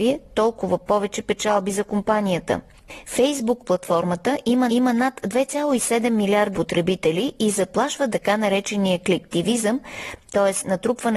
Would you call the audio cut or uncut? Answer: cut